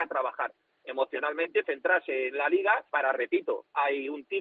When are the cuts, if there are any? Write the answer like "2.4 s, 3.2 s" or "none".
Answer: 1.6 s, 2.9 s

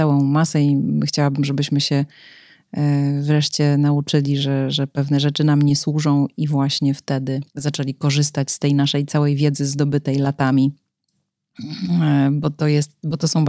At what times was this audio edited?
7.5 s

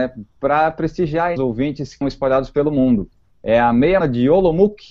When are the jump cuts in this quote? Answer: 1.4 s, 2.0 s, 4.0 s

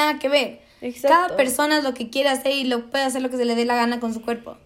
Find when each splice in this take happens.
none

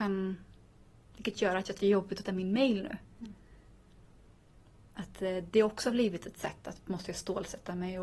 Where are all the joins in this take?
1.7 s, 2.2 s

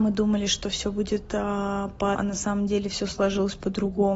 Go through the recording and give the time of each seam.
2.1 s

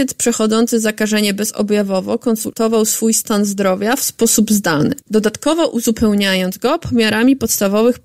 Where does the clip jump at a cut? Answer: 5.0 s

